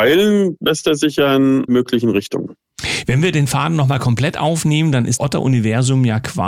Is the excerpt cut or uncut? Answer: cut